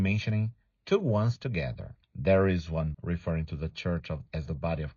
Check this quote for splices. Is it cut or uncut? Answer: cut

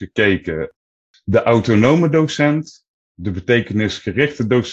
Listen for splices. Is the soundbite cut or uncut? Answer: uncut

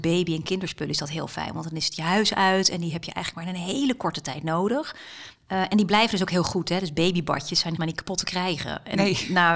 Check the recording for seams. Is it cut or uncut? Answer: cut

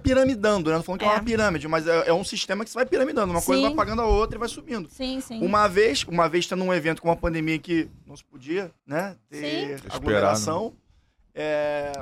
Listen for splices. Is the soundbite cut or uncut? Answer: cut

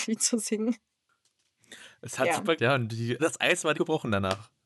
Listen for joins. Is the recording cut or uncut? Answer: cut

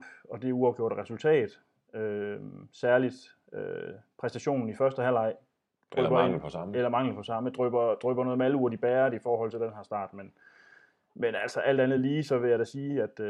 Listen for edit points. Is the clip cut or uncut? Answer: uncut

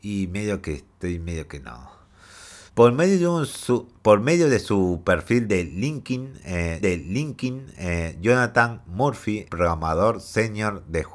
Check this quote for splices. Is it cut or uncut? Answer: cut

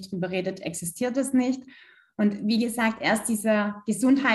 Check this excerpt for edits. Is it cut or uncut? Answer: uncut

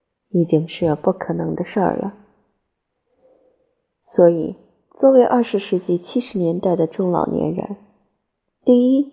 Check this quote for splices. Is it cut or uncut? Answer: uncut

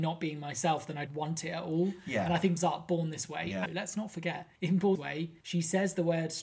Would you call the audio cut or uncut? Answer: cut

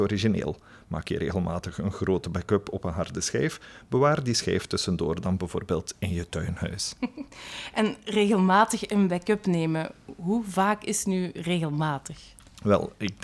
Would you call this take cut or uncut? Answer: uncut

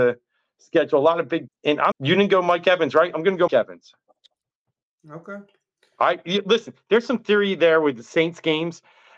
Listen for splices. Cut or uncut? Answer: cut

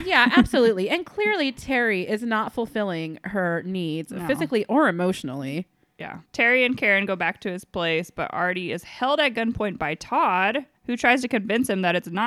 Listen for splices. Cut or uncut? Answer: cut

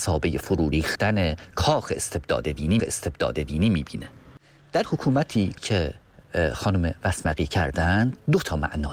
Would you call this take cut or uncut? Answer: cut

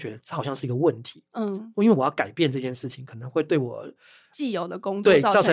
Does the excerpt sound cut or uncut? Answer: uncut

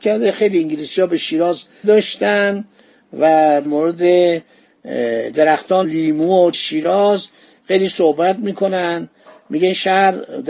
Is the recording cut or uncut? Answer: cut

